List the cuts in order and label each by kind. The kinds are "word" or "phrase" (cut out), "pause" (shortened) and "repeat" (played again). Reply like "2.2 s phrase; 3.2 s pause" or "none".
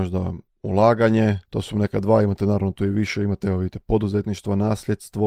1.4 s pause